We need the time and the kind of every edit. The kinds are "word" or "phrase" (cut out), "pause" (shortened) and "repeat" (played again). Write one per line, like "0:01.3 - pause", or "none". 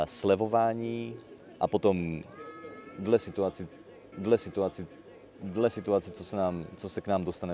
0:01.6 - word
0:04.1 - repeat

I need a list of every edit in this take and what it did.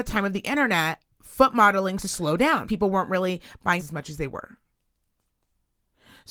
0:02.0 - word
0:02.6 - word
0:03.8 - word

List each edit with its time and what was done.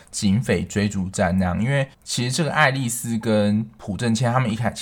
0:01.9 - pause

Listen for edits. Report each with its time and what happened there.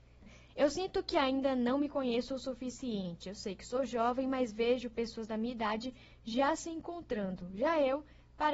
none

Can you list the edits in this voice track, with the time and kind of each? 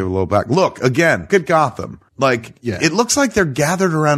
0:01.3 - word
0:02.1 - pause

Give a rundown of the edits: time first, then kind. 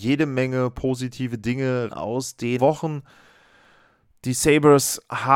0:01.9 - word
0:02.6 - word

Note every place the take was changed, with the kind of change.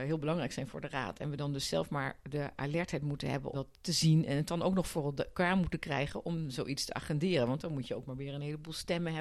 0:03.5 - word

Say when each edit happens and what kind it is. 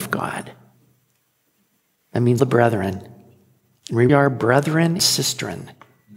0:02.4 - word
0:04.1 - word
0:05.0 - word

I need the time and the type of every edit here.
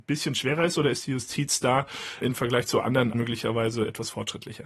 0:02.2 - word
0:03.1 - word

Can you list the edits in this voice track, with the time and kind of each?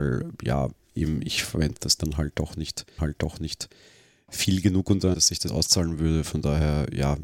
0:02.0 - word
0:03.0 - repeat
0:05.1 - word
0:05.5 - word

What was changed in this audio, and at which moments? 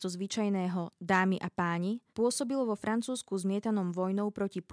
0:02.1 - pause

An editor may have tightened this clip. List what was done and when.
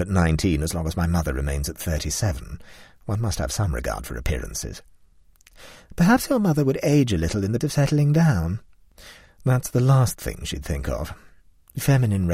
0:07.6 - word

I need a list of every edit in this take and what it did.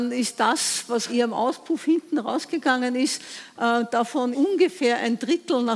0:01.1 - word
0:04.3 - word

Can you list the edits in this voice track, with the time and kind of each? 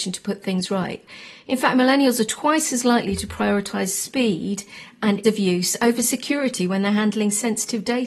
0:05.2 - word

